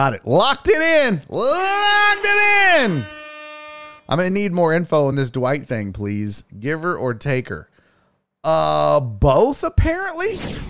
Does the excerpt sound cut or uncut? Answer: uncut